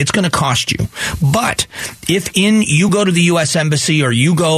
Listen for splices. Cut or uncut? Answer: uncut